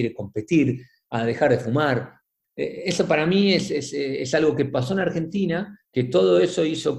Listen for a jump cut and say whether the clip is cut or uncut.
cut